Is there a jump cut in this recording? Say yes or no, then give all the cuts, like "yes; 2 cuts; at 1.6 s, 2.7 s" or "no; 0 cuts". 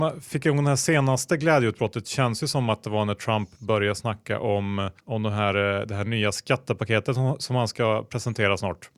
yes; 1 cut; at 5.0 s